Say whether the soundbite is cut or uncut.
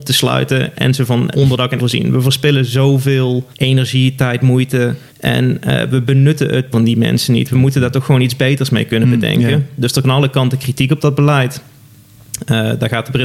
cut